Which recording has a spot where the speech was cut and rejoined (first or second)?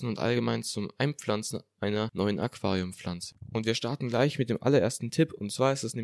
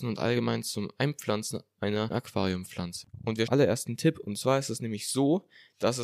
second